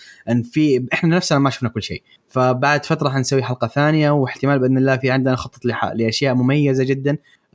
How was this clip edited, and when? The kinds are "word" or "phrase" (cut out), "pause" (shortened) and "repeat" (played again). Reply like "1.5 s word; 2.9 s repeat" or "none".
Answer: none